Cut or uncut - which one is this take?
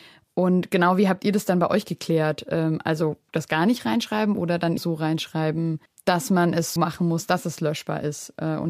cut